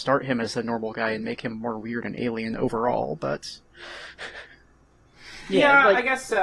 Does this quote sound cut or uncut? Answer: uncut